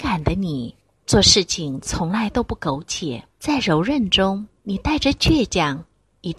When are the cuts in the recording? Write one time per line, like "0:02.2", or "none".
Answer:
0:03.3
0:04.6